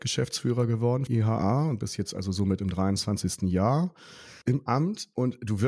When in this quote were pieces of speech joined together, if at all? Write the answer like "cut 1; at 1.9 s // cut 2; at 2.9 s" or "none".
cut 1; at 1.1 s // cut 2; at 4.4 s